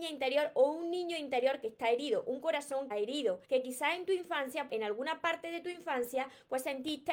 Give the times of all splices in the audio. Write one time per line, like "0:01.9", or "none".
0:02.9
0:03.4
0:04.7